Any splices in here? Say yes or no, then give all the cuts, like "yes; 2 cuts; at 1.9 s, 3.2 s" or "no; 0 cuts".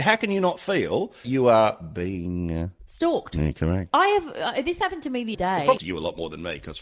yes; 3 cuts; at 1.2 s, 5.3 s, 5.8 s